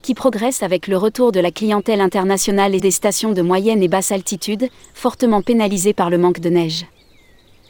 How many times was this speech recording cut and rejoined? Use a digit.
1